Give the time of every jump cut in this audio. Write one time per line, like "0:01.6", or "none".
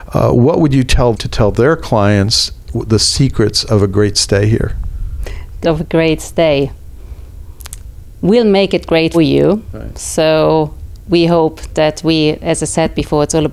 0:01.1
0:05.6
0:09.1